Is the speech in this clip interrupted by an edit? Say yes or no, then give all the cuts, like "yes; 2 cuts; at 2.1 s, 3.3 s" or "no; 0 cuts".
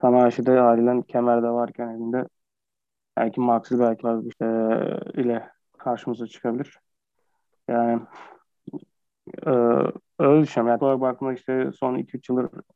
yes; 3 cuts; at 4.0 s, 4.3 s, 10.8 s